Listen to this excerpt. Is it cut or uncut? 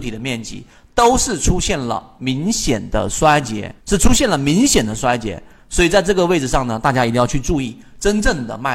cut